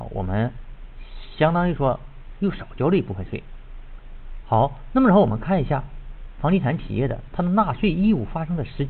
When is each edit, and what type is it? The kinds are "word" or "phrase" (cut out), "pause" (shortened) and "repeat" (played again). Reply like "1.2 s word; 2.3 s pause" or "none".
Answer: 4.4 s word